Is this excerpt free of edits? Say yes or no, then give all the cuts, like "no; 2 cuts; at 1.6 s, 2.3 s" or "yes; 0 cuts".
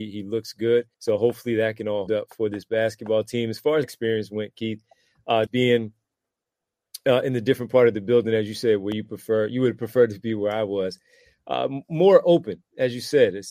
no; 4 cuts; at 0.9 s, 2.1 s, 3.8 s, 5.5 s